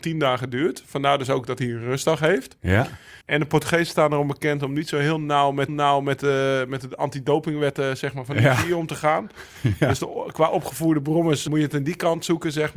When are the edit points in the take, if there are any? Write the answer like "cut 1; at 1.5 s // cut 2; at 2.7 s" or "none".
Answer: cut 1; at 3.2 s // cut 2; at 5.7 s // cut 3; at 11.5 s